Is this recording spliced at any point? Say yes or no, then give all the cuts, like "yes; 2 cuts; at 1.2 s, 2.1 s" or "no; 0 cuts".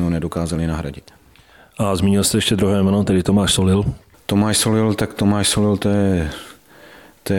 no; 0 cuts